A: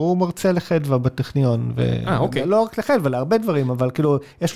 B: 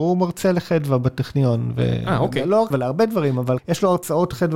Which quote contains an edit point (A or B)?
B